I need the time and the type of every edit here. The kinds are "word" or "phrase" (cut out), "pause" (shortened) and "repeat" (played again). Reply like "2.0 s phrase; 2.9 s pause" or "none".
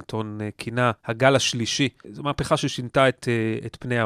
1.0 s pause; 2.0 s word